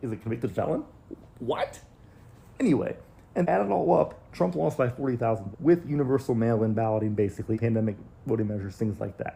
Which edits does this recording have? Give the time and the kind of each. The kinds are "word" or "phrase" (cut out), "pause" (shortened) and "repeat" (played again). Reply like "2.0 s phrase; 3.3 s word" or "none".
3.4 s word; 5.5 s word; 7.5 s word